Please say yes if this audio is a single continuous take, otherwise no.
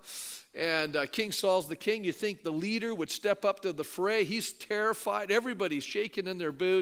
yes